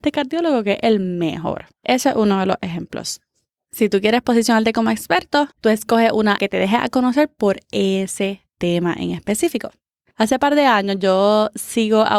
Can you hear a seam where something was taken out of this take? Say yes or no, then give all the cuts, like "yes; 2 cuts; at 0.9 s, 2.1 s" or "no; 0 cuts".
yes; 3 cuts; at 1.7 s, 5.5 s, 6.4 s